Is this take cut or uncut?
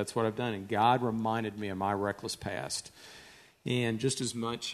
uncut